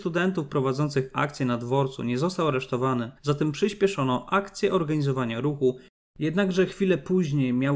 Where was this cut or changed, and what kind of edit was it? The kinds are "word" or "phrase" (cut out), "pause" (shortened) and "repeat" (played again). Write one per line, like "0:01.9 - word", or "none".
0:03.2 - pause

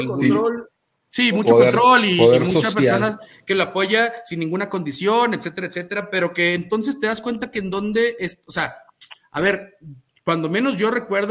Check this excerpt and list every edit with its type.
none

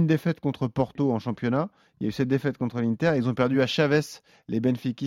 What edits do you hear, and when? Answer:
none

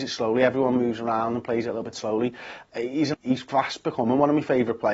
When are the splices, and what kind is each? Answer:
0:03.1 - phrase

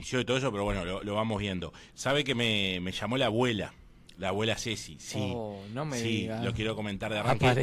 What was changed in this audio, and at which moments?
none

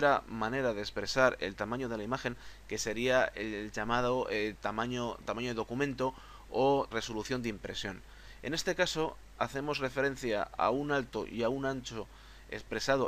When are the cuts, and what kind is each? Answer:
0:06.9 - word

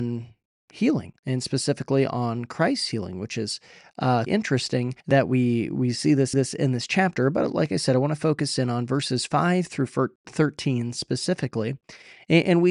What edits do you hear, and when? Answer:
0:01.2 - pause
0:04.3 - word
0:05.0 - pause
0:06.3 - repeat

